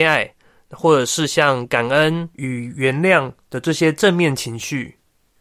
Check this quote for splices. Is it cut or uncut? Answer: uncut